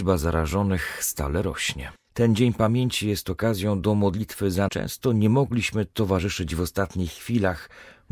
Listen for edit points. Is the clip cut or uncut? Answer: cut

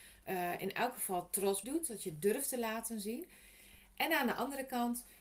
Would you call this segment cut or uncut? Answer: cut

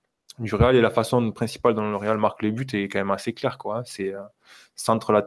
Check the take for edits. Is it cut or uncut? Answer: uncut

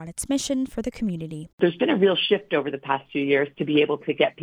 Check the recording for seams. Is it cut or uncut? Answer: cut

